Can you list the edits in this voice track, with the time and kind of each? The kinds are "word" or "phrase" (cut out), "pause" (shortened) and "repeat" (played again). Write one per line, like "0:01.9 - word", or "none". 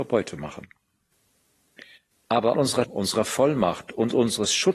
0:02.5 - word
0:02.8 - word